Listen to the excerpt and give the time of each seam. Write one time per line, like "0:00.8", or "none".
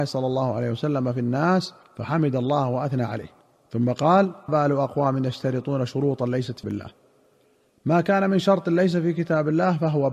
0:01.8
0:03.4
0:04.5
0:06.6